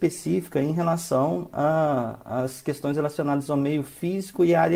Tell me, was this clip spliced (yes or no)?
no